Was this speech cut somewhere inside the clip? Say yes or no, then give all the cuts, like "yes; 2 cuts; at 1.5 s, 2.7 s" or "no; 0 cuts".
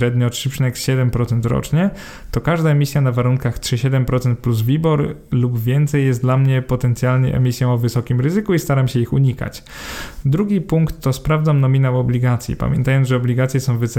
no; 0 cuts